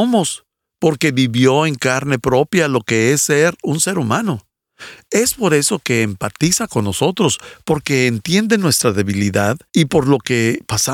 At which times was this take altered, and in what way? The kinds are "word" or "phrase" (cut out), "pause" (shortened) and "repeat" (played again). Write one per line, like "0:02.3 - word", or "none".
0:09.7 - pause